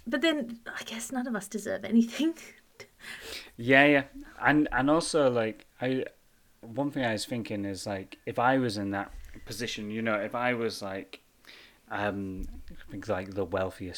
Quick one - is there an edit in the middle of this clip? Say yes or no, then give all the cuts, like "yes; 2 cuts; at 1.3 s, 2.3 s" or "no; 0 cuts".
no; 0 cuts